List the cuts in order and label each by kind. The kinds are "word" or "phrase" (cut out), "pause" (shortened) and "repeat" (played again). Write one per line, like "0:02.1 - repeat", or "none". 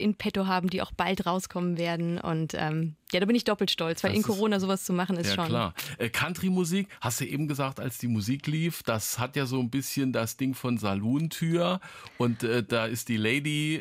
none